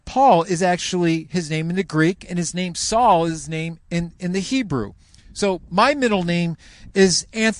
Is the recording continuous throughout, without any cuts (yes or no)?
yes